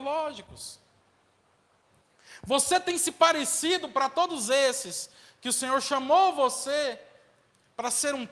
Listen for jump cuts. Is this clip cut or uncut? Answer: uncut